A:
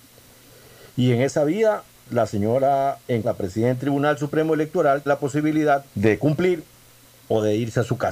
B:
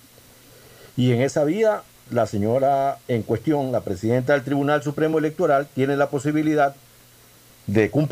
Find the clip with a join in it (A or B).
A